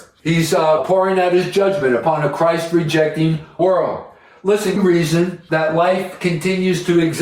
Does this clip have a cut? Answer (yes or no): yes